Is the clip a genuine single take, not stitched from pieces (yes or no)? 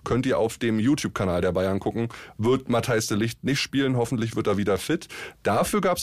yes